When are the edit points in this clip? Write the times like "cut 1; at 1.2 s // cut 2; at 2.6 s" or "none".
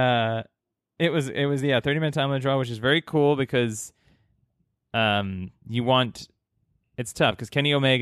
none